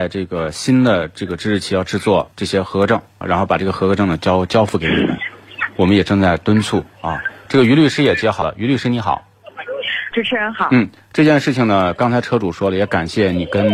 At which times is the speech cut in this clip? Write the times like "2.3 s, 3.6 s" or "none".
3.2 s, 10.1 s